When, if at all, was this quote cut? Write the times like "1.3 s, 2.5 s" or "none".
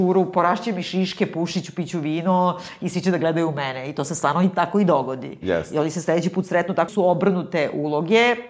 6.9 s